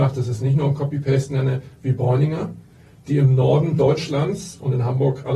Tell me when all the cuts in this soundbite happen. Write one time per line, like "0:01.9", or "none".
none